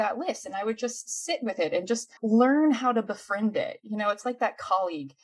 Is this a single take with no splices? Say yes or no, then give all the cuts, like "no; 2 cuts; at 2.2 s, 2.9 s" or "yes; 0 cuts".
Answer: no; 1 cut; at 2.2 s